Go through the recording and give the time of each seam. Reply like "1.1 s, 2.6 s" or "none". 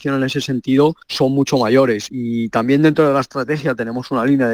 1.0 s